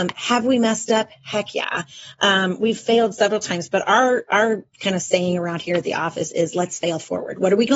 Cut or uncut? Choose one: uncut